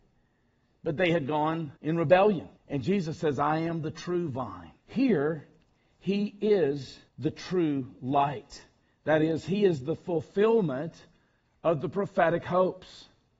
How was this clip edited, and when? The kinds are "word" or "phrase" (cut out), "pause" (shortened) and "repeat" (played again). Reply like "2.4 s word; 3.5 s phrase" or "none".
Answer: 1.8 s pause; 2.6 s pause; 4.8 s pause; 7.1 s pause; 8.8 s pause